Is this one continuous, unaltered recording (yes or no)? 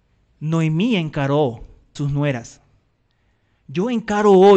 no